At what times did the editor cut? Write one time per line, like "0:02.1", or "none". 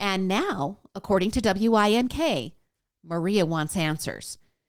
none

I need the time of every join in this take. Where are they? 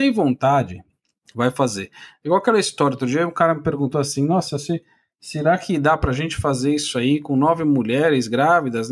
none

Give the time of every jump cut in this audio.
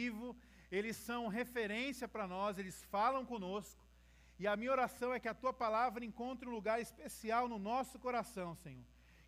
none

